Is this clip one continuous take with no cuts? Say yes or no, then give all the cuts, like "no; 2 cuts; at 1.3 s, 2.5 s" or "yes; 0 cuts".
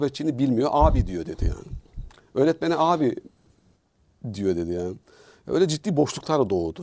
yes; 0 cuts